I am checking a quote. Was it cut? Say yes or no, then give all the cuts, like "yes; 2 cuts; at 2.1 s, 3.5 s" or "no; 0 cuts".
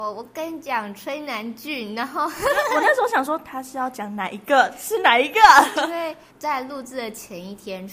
yes; 1 cut; at 6.3 s